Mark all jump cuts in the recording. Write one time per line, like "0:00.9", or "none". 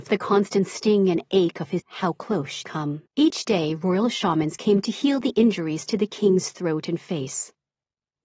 0:01.8
0:02.6
0:03.1

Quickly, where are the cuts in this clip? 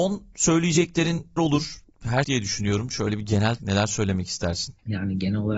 0:01.4
0:02.2
0:03.6

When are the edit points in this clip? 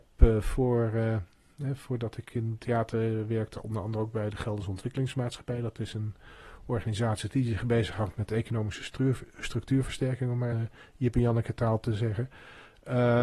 0:10.5

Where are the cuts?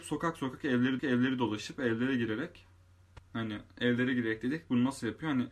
0:01.0

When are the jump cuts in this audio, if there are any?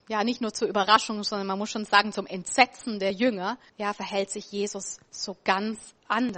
0:03.7

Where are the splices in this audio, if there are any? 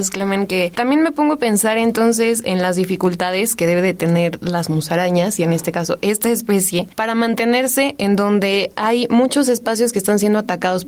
none

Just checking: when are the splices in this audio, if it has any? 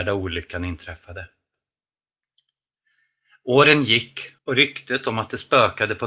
0:04.4

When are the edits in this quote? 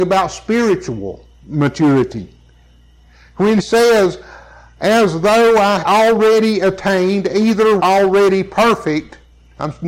0:03.6
0:05.8
0:07.8

